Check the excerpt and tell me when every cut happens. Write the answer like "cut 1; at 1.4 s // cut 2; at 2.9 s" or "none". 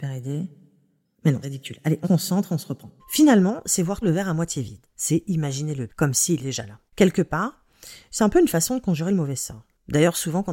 cut 1; at 1.4 s // cut 2; at 2.0 s // cut 3; at 3.0 s // cut 4; at 4.0 s // cut 5; at 4.9 s // cut 6; at 5.9 s // cut 7; at 6.4 s // cut 8; at 6.9 s